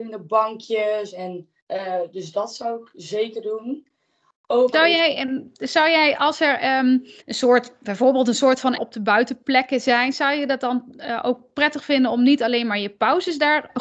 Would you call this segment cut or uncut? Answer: cut